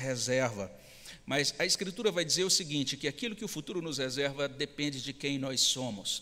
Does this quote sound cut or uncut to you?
uncut